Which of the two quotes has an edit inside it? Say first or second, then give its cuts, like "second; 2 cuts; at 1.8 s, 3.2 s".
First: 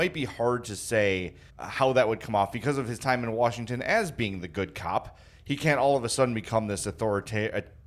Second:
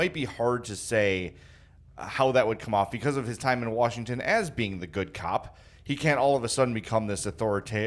first; 1 cut; at 1.5 s